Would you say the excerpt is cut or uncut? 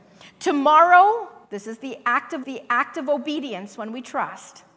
cut